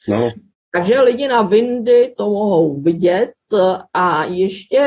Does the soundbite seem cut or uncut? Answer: uncut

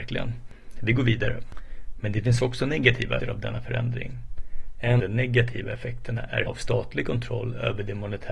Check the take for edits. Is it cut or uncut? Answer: cut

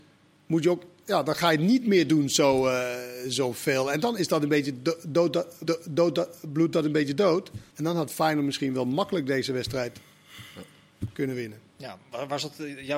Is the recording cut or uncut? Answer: cut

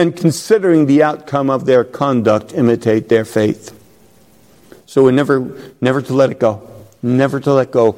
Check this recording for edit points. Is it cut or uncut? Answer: uncut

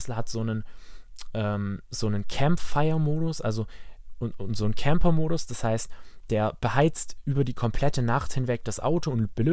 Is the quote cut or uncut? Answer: uncut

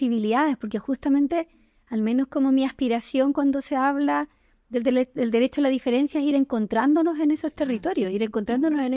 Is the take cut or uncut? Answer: uncut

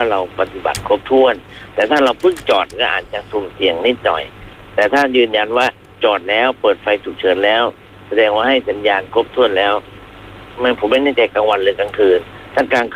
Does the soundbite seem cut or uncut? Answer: uncut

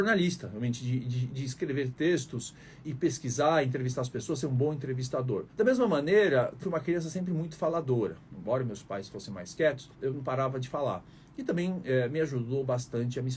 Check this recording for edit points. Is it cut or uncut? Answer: cut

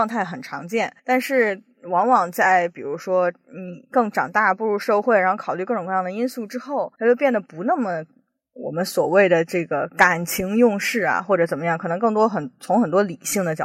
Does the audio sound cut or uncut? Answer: cut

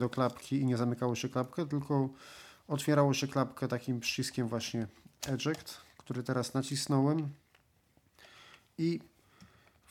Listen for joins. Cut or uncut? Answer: uncut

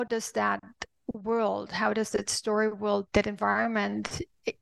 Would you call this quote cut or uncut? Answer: cut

